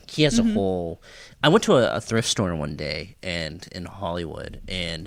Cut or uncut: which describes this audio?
uncut